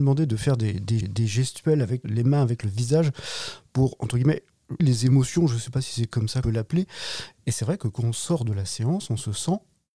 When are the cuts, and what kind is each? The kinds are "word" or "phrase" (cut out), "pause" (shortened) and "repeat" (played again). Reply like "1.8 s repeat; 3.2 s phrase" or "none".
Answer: 1.0 s repeat; 2.0 s word; 4.8 s word; 6.4 s phrase